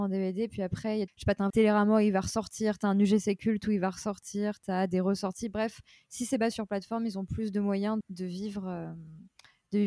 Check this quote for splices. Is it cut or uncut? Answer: cut